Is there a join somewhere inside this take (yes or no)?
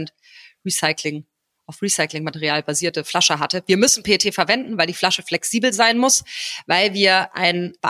no